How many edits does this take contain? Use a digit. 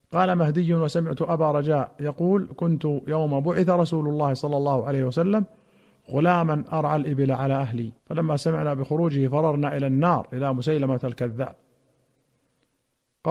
1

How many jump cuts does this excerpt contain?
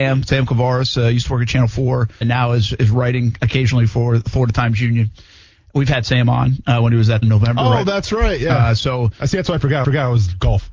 3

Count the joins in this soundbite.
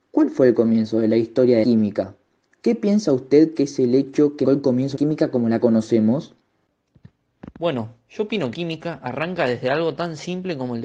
4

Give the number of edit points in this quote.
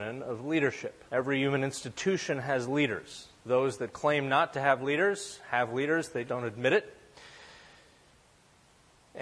3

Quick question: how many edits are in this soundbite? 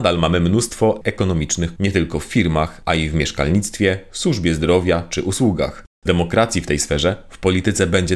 3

